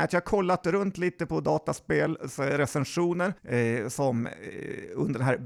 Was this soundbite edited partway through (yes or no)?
yes